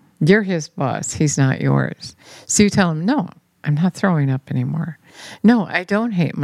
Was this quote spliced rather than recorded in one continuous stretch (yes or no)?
no